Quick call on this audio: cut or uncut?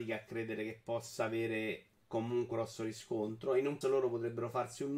cut